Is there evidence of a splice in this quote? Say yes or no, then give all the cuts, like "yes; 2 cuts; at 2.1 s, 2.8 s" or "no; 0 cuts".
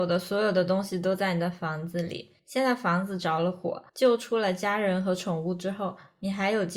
yes; 2 cuts; at 2.4 s, 3.9 s